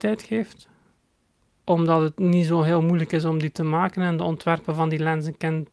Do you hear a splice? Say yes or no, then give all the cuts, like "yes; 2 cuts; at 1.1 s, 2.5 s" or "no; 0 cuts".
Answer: no; 0 cuts